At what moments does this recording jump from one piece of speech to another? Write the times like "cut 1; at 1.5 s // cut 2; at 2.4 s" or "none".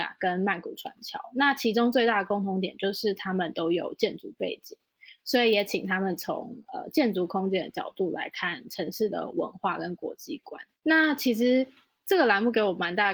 cut 1; at 10.7 s